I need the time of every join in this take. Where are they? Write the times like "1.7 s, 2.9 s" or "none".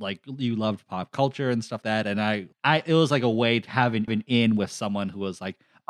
1.8 s, 2.5 s, 3.7 s, 4.1 s

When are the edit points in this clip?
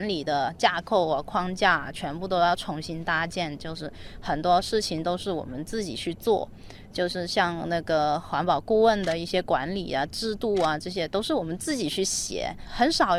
none

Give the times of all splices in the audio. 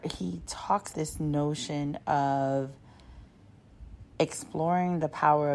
0.9 s

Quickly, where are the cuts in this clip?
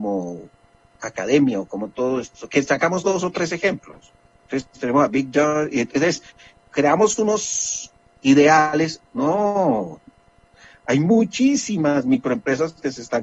none

